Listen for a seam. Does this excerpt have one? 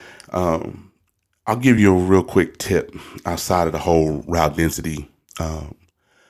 no; 0 cuts

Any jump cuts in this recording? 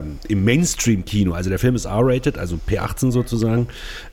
no; 0 cuts

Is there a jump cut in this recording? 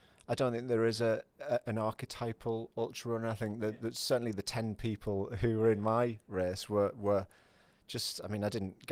no; 0 cuts

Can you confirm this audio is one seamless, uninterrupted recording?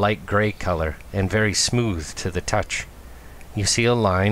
yes; 0 cuts

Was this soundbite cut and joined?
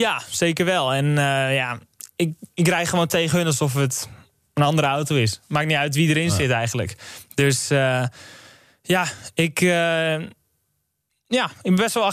no; 0 cuts

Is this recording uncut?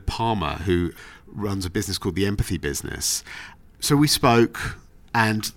yes; 0 cuts

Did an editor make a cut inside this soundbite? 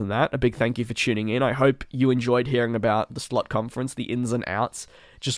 no; 0 cuts

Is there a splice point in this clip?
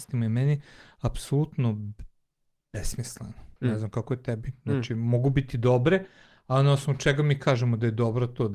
yes; 1 cut; at 3.6 s

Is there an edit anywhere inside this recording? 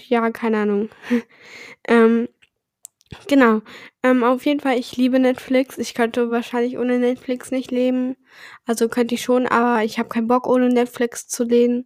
no; 0 cuts

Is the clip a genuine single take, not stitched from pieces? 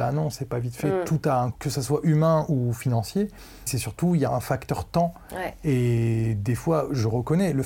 no; 3 cuts; at 1.5 s, 3.7 s, 4.3 s

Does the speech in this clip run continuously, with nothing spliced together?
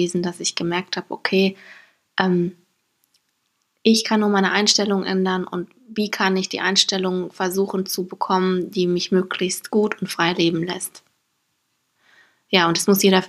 yes; 0 cuts

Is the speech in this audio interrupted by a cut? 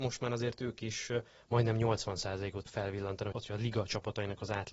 yes; 2 cuts; at 2.7 s, 3.3 s

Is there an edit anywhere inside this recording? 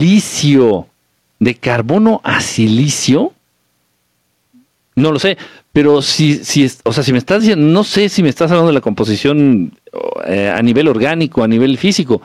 no; 0 cuts

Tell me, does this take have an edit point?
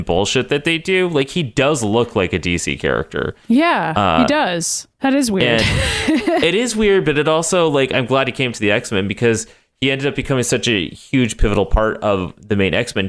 no; 0 cuts

